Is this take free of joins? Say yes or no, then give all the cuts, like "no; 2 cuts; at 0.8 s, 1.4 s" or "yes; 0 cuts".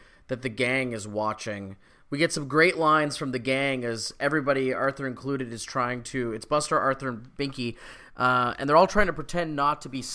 yes; 0 cuts